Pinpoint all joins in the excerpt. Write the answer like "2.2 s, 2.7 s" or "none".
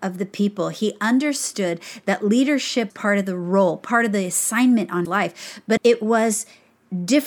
2.9 s, 5.0 s, 5.8 s